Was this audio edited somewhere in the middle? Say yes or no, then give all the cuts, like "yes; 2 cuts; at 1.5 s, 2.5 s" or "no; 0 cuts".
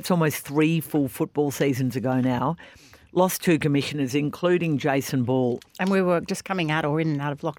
no; 0 cuts